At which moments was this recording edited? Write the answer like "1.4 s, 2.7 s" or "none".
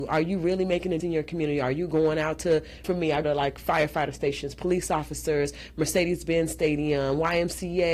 1.0 s, 2.8 s, 3.2 s